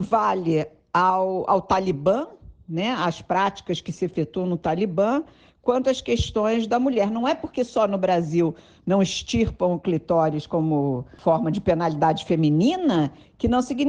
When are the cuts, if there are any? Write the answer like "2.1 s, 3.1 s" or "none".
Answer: none